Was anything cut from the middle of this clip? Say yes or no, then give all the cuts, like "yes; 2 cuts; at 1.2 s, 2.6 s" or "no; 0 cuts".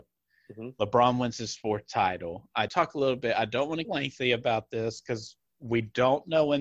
yes; 3 cuts; at 2.7 s, 3.8 s, 5.5 s